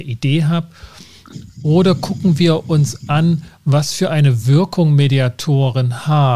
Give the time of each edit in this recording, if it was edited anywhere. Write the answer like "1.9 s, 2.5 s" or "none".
none